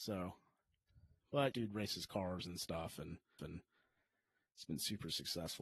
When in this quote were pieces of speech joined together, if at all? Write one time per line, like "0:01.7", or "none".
0:01.5
0:03.4